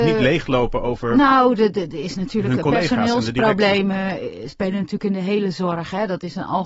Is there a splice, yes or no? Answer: no